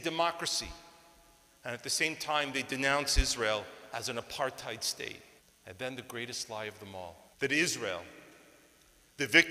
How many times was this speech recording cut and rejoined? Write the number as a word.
two